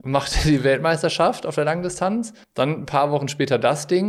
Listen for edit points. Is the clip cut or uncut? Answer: cut